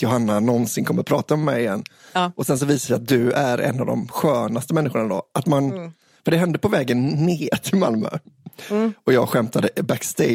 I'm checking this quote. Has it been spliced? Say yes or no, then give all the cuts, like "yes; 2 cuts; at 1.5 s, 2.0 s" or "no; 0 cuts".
no; 0 cuts